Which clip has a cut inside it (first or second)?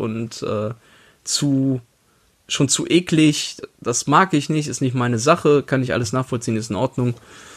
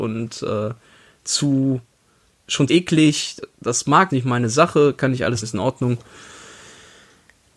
second